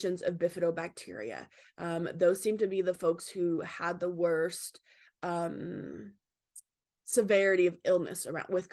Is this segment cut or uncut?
uncut